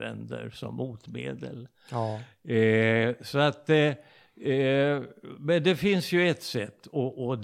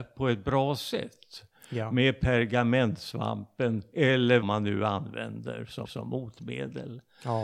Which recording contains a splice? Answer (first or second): second